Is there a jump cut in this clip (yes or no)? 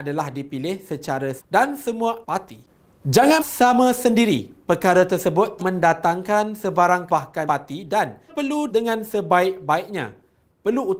yes